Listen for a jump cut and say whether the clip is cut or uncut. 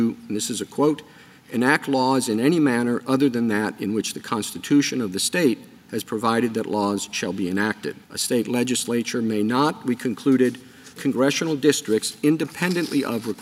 cut